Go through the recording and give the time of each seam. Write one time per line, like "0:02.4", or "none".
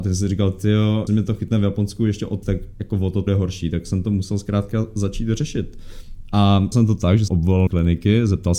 0:01.1
0:02.4
0:03.3
0:06.7
0:07.3
0:07.7